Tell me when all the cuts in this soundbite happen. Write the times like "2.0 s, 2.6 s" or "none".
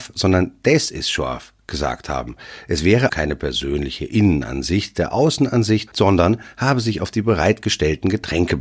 3.1 s, 5.9 s